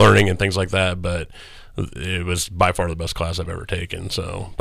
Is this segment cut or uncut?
uncut